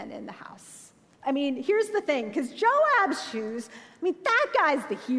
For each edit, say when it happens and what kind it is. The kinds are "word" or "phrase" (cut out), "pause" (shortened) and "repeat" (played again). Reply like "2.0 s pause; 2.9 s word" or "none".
none